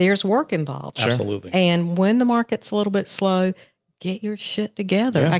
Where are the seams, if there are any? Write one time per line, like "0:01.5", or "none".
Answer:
none